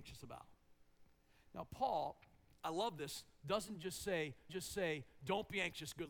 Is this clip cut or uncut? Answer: cut